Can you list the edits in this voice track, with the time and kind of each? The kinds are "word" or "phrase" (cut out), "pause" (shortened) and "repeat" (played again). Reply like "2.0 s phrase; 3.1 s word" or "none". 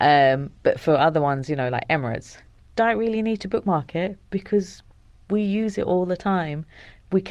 none